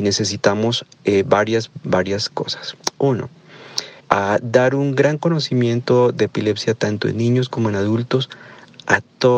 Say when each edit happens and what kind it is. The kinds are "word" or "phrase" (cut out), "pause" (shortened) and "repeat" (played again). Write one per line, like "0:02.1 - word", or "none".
0:04.0 - pause